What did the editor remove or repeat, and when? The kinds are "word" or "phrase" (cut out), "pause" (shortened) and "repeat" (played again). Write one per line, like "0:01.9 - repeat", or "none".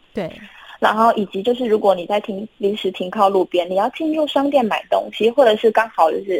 none